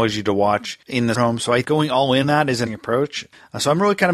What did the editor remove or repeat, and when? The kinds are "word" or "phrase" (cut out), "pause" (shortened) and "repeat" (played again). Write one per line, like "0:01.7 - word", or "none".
0:01.1 - word
0:01.6 - word
0:02.2 - word
0:02.7 - word